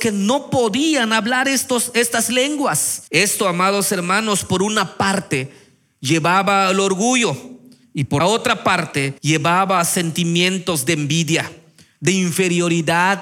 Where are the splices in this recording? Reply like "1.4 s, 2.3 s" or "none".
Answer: 3.1 s, 8.2 s, 9.2 s